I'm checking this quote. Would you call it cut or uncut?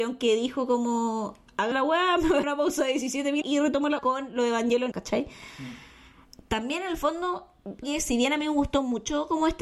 cut